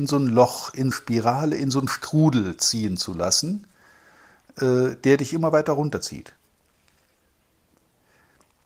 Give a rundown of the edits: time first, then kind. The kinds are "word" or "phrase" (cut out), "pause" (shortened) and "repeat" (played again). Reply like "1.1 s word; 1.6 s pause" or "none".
0.9 s phrase

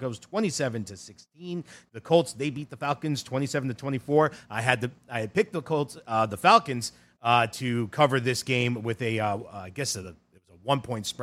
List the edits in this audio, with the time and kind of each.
none

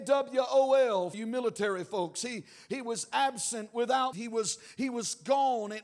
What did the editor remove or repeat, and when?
1.1 s word; 4.1 s word

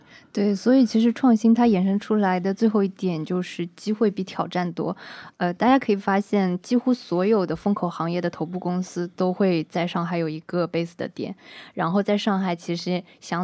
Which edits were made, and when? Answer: none

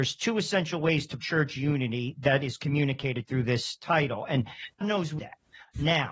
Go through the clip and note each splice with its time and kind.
1.2 s word; 4.8 s word; 5.2 s word

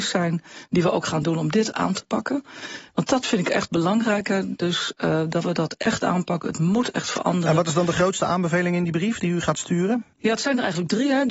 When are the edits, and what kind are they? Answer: 10.1 s pause

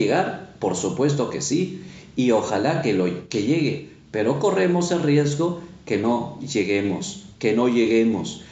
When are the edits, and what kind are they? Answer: 7.3 s pause

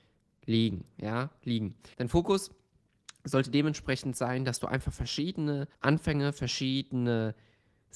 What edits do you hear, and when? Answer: 1.9 s pause; 5.7 s pause

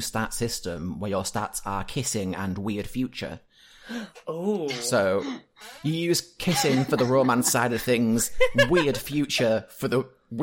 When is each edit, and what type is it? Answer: none

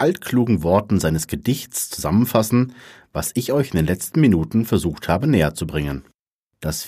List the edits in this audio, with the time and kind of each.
none

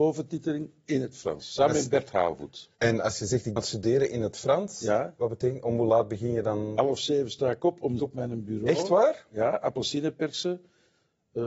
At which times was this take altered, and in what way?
2.8 s pause; 3.6 s phrase; 8.0 s phrase

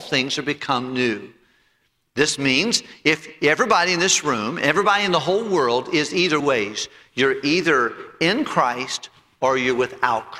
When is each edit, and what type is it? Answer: 6.4 s phrase

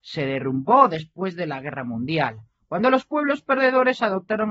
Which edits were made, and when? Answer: none

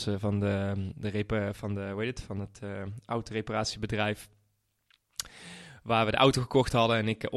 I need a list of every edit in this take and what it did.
none

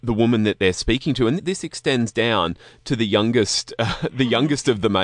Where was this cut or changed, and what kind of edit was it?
1.4 s word

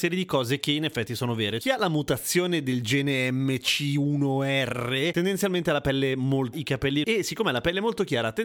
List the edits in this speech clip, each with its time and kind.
1.6 s word; 6.5 s word; 7.0 s word

